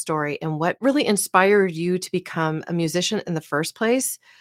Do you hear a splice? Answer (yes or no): no